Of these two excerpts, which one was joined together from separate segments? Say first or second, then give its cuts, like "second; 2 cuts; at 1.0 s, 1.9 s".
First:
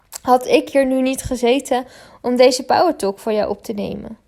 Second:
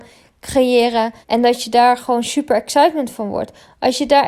second; 1 cut; at 1.2 s